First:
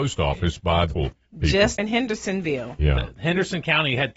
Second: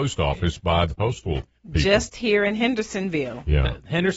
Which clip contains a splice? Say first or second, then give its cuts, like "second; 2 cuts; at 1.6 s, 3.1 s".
first; 2 cuts; at 1.0 s, 1.8 s